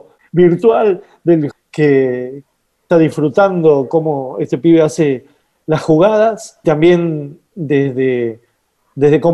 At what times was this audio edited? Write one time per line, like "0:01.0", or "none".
0:01.5
0:02.9
0:06.6